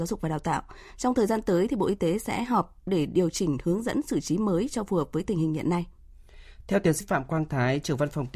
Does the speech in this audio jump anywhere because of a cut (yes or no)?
yes